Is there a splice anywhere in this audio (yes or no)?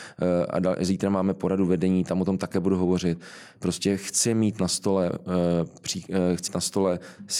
yes